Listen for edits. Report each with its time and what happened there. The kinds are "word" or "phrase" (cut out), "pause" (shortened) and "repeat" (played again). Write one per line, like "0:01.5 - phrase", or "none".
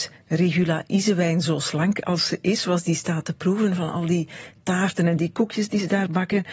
none